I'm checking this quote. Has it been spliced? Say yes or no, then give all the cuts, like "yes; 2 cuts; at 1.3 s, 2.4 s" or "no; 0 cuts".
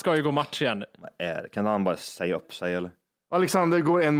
no; 0 cuts